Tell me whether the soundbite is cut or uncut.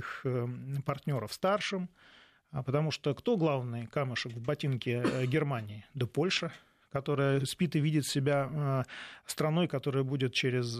uncut